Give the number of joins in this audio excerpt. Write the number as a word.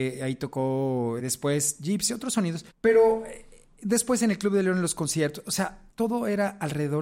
three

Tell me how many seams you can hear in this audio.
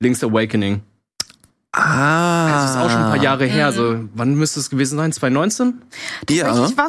zero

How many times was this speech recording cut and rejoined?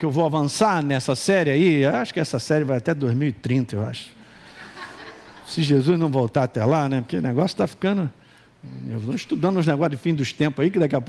zero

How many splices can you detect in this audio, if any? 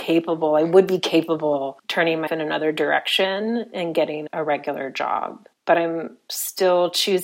three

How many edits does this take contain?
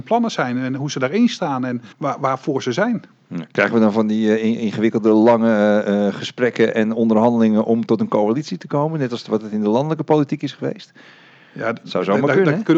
one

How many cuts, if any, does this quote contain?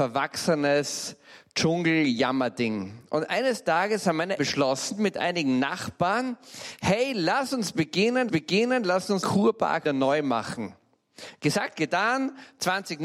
four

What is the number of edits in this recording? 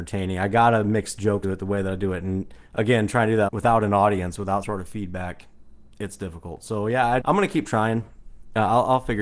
five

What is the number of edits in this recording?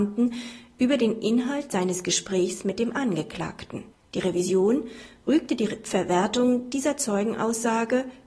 one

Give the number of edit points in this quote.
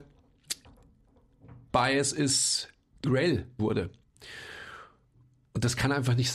three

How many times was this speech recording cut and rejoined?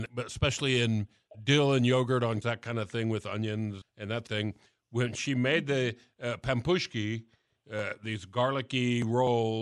four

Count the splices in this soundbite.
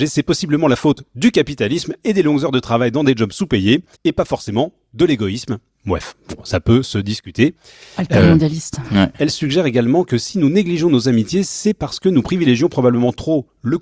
one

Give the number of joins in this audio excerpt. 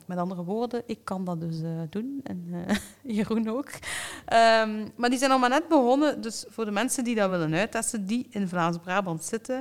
zero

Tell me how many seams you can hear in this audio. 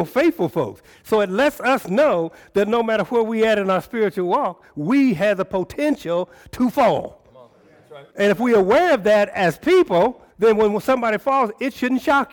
two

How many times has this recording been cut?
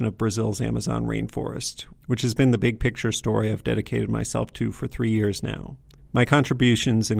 one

